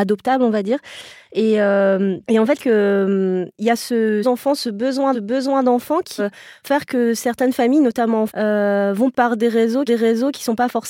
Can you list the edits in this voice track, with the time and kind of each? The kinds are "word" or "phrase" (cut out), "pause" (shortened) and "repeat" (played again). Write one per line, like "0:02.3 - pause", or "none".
0:02.2 - pause
0:02.6 - phrase
0:04.2 - phrase
0:05.1 - repeat
0:06.2 - word
0:08.3 - word
0:09.1 - word
0:09.9 - repeat